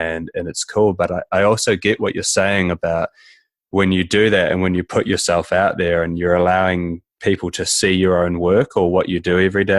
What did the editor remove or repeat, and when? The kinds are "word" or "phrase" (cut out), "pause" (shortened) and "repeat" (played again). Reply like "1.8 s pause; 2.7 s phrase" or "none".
none